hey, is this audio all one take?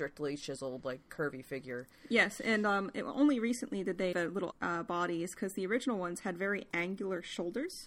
no; 2 cuts; at 4.1 s, 4.5 s

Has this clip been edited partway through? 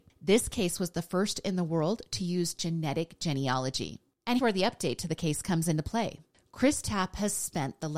yes; 1 cut; at 4.4 s

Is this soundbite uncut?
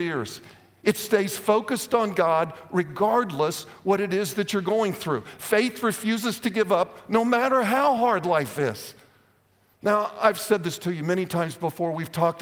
yes; 0 cuts

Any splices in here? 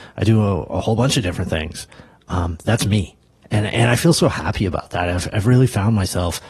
no; 0 cuts

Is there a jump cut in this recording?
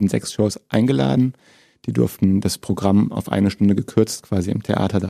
no; 0 cuts

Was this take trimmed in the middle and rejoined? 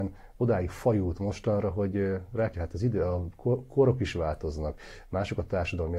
yes; 1 cut; at 2.5 s

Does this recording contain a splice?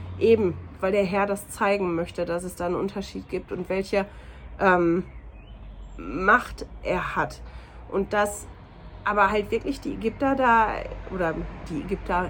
no; 0 cuts

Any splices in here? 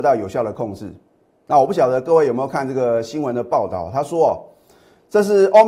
no; 0 cuts

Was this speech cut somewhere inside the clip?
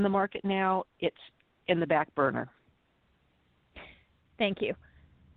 no; 0 cuts

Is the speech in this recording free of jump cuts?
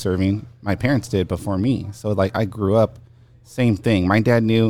yes; 0 cuts

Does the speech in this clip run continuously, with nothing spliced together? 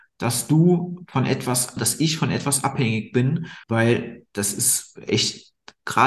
no; 2 cuts; at 1.8 s, 3.6 s

